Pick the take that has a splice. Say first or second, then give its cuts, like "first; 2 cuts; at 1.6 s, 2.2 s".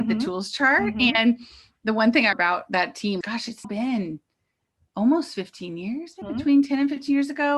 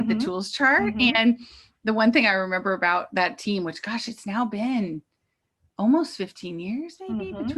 first; 4 cuts; at 2.3 s, 3.2 s, 3.6 s, 6.2 s